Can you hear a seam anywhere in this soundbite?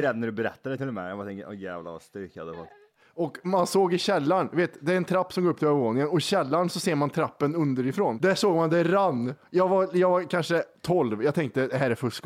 no; 0 cuts

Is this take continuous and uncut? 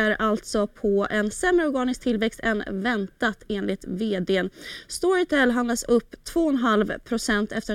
yes; 0 cuts

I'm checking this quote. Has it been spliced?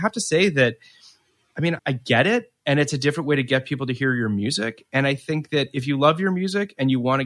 yes; 1 cut; at 1.8 s

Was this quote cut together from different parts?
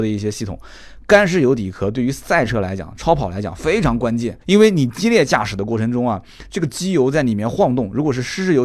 yes; 1 cut; at 4.4 s

